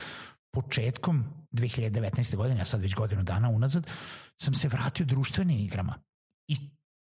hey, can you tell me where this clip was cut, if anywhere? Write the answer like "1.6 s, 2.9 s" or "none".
1.5 s